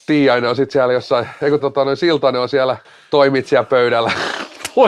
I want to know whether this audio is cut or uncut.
cut